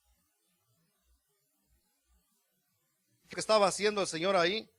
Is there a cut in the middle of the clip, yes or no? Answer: yes